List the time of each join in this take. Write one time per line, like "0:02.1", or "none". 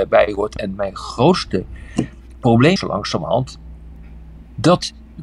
0:02.8